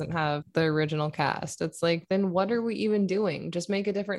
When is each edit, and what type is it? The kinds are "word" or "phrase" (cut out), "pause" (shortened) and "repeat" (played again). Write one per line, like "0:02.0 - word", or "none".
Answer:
none

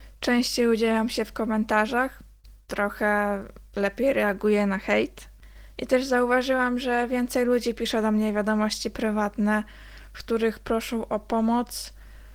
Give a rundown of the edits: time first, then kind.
none

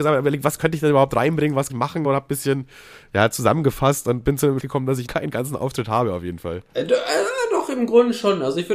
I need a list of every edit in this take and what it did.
0:01.7 - word
0:02.0 - word
0:04.6 - word
0:05.1 - word

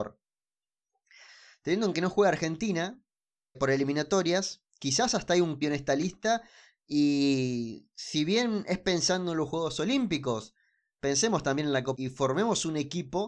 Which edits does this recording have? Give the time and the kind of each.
0:01.9 - word
0:03.5 - word
0:05.6 - word
0:11.9 - word

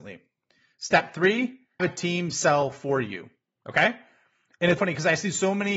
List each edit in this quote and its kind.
0:01.8 - word
0:04.8 - word

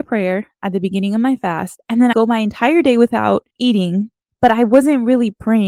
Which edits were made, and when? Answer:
0:02.1 - phrase
0:03.5 - pause

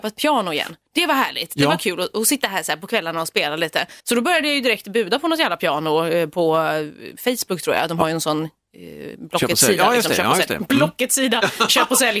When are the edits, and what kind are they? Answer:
0:04.0 - pause

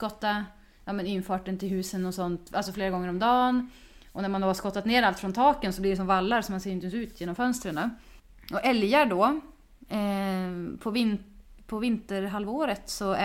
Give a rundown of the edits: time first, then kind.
none

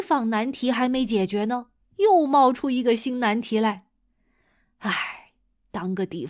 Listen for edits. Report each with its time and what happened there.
none

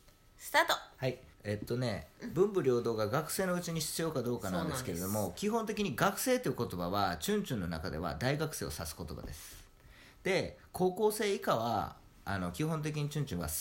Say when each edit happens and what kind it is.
0:01.3 - pause

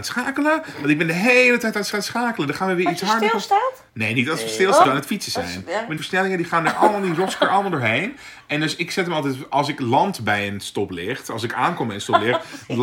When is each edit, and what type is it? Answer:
0:01.9 - repeat
0:03.9 - pause
0:04.8 - phrase
0:06.0 - phrase

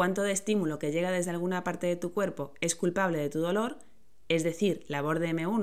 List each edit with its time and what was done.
none

